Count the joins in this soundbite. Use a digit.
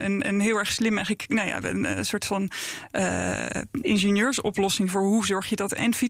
1